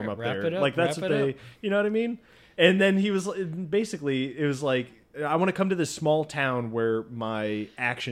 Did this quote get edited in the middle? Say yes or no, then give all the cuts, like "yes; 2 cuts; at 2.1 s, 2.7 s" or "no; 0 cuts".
no; 0 cuts